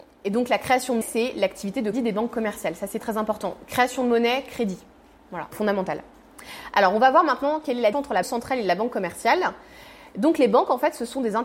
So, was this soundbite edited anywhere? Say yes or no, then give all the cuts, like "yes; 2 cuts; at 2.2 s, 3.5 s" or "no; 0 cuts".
yes; 6 cuts; at 1.0 s, 1.9 s, 3.0 s, 5.5 s, 7.9 s, 8.2 s